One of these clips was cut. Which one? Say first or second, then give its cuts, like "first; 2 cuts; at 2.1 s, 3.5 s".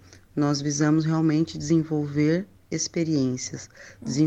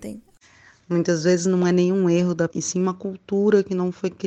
second; 1 cut; at 2.5 s